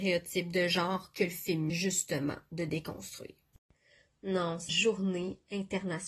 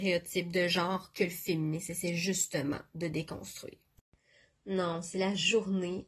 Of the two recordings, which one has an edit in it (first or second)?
first